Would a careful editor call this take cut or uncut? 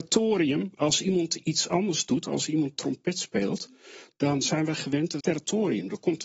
cut